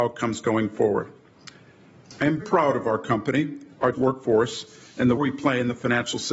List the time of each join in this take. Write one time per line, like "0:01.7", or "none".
0:02.4
0:03.9
0:05.2